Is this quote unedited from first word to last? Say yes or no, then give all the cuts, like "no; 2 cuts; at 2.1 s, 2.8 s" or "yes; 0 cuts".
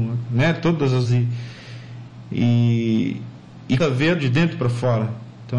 no; 3 cuts; at 1.0 s, 3.8 s, 4.2 s